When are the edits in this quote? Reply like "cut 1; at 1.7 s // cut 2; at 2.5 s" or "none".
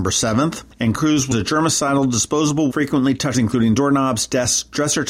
cut 1; at 0.9 s // cut 2; at 1.3 s // cut 3; at 2.7 s // cut 4; at 3.3 s